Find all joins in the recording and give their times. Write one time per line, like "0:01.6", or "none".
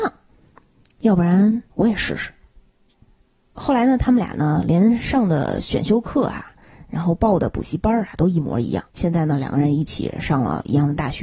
0:01.7
0:08.9